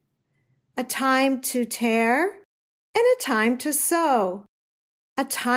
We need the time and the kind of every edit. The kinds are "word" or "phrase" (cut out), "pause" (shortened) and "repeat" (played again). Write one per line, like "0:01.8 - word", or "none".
none